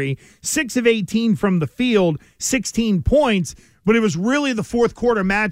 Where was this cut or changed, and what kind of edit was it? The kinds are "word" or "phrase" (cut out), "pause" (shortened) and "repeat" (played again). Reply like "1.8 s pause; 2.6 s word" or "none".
none